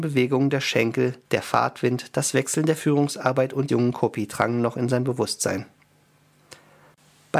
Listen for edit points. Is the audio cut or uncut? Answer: cut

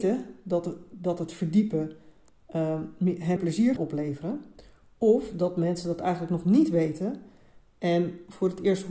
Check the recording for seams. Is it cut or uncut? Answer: cut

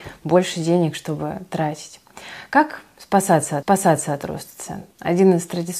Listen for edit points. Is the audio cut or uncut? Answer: cut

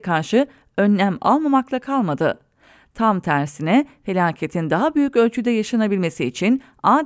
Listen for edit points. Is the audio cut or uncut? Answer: uncut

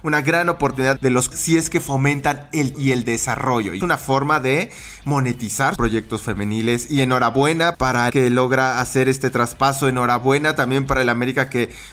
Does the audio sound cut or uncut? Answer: cut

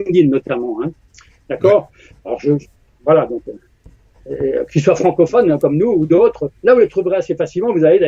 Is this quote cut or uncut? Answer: uncut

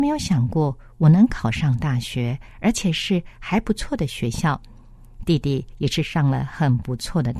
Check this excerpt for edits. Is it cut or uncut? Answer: cut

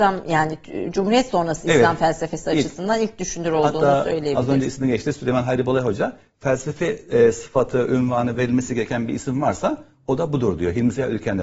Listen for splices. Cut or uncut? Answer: uncut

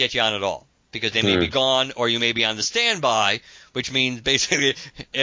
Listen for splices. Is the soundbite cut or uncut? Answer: uncut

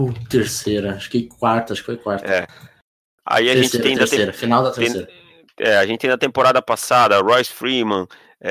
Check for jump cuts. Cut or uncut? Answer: uncut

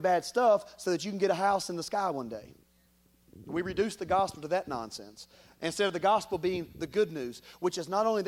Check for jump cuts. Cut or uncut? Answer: uncut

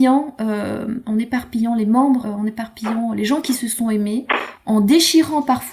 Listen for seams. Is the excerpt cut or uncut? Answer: cut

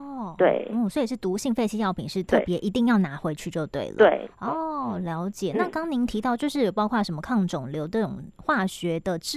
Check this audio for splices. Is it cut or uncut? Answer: uncut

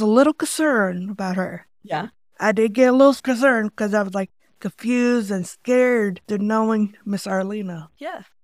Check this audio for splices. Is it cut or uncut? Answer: uncut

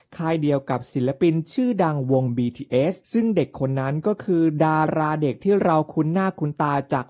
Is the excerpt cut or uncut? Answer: cut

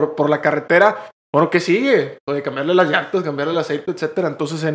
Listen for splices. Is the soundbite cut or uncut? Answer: uncut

